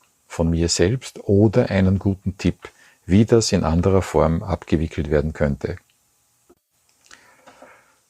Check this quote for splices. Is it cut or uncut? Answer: uncut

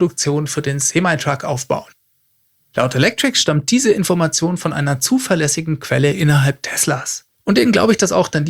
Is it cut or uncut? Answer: uncut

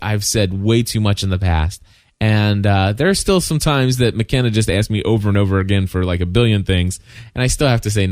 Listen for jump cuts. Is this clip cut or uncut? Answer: uncut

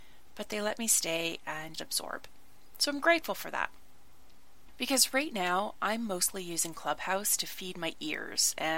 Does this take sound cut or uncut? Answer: cut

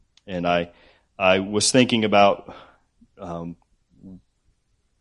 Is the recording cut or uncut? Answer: uncut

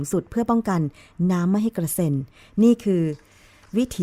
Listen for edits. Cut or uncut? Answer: uncut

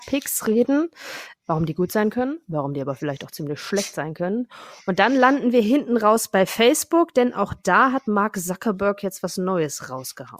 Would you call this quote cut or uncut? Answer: uncut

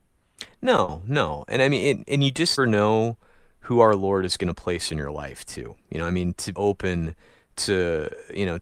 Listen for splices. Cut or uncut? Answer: cut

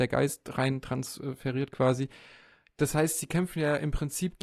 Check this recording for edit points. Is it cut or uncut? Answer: uncut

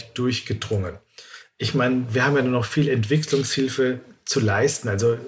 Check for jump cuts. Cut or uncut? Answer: uncut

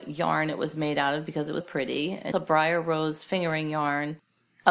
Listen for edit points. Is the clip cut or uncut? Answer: cut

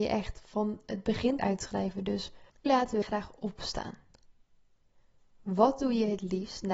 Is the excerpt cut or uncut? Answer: cut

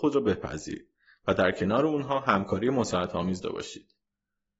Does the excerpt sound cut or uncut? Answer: cut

